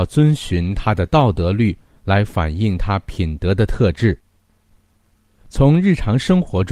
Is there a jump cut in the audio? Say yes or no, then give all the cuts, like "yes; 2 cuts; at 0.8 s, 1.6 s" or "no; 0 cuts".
no; 0 cuts